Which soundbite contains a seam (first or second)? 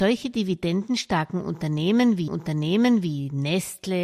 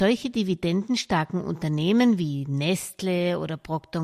first